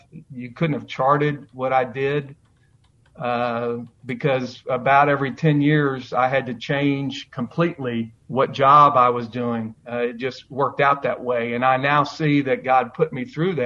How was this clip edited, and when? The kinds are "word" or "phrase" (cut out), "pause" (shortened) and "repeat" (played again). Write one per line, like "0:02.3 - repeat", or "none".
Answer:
0:08.2 - pause